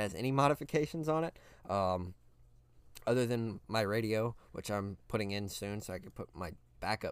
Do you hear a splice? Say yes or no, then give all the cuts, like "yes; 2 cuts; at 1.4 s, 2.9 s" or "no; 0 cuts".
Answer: no; 0 cuts